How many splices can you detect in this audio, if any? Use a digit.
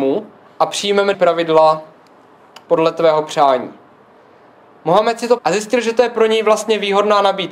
2